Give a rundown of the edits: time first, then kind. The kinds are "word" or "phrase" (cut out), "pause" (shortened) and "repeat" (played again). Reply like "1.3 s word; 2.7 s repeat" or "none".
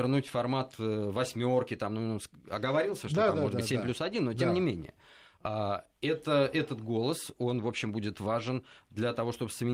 none